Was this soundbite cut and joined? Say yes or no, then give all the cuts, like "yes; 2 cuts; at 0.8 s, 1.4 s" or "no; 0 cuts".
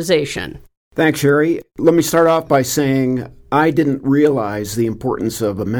no; 0 cuts